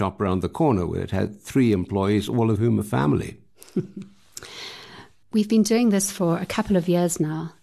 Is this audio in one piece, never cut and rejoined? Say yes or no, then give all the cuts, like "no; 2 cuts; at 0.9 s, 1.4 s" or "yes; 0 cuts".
yes; 0 cuts